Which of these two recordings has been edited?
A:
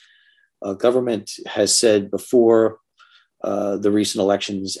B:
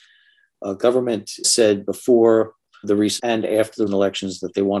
B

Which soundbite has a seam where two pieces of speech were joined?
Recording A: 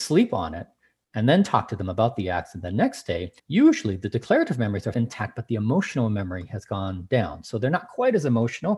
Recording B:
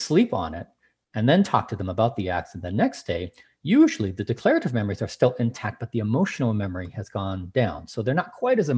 A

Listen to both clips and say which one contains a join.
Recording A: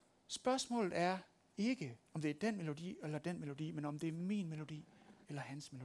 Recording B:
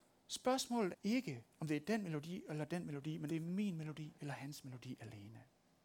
B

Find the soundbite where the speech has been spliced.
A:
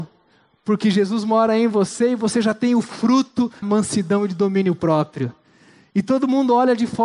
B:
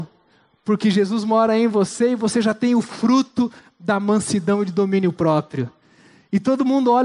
A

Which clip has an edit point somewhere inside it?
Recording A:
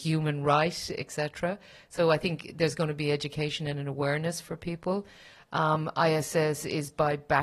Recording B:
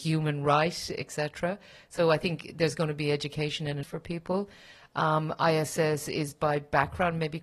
B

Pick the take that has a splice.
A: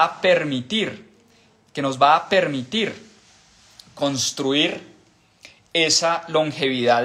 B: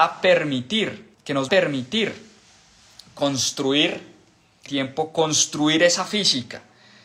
B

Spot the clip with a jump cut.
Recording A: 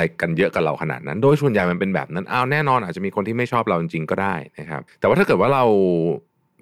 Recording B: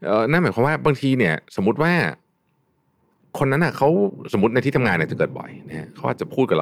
A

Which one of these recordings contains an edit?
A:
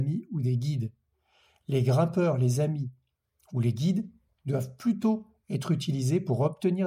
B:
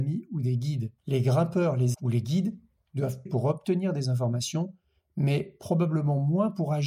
B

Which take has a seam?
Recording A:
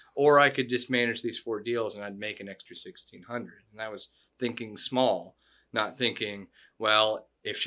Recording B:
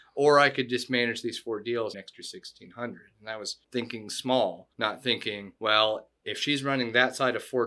B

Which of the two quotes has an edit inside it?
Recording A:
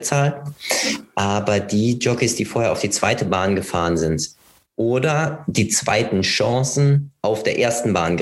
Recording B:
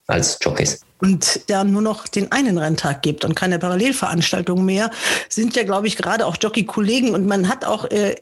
B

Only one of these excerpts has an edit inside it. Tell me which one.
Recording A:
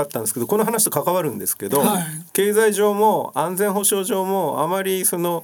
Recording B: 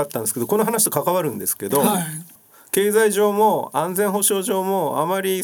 A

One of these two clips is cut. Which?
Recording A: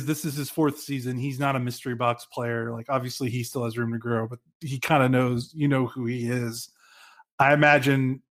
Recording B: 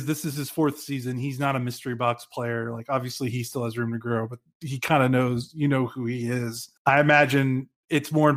B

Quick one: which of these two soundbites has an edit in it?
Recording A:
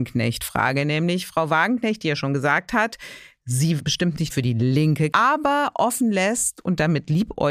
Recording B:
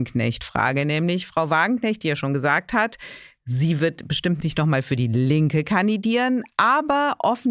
A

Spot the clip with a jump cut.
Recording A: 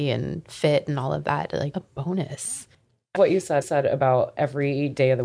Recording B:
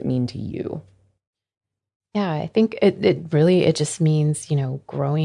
A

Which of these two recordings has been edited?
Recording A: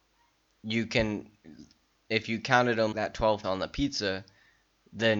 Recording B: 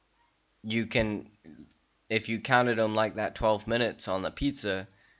A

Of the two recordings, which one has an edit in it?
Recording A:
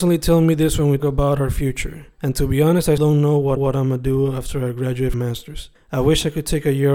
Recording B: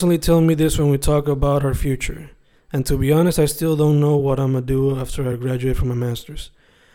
A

